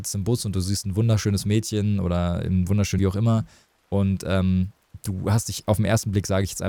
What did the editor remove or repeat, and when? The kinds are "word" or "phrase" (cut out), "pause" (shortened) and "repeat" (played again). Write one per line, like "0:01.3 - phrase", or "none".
0:03.0 - word